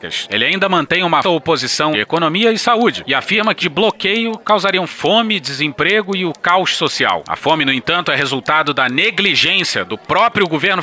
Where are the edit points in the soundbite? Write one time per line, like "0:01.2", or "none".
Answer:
0:01.2
0:01.9
0:03.6